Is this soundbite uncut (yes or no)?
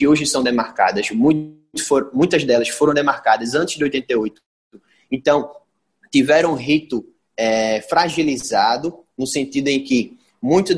yes